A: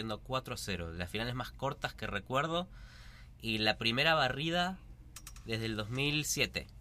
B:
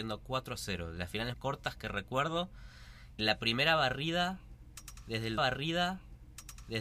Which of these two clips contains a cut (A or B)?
B